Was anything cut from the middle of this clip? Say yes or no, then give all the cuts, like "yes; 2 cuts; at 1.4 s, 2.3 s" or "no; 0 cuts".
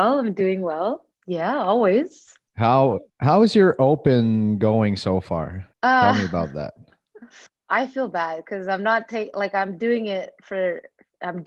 yes; 4 cuts; at 1.1 s, 3.1 s, 5.7 s, 7.5 s